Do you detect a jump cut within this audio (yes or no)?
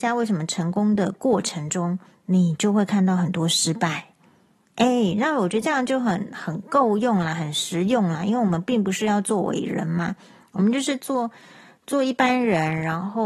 no